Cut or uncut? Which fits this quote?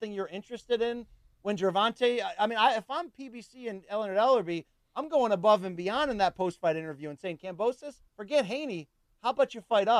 cut